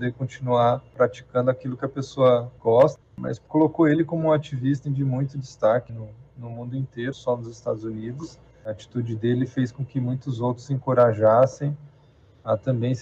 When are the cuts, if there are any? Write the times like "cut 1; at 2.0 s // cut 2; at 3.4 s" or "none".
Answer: cut 1; at 2.6 s // cut 2; at 3.5 s // cut 3; at 4.8 s // cut 4; at 5.9 s // cut 5; at 7.1 s